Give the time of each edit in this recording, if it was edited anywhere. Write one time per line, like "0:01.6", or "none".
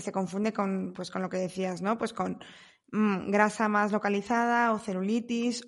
none